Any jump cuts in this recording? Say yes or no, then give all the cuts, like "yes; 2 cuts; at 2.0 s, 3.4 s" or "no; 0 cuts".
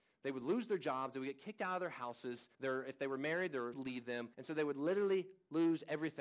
yes; 3 cuts; at 2.5 s, 3.7 s, 4.3 s